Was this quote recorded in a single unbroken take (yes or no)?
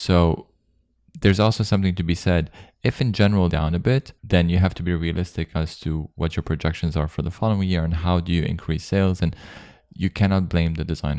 no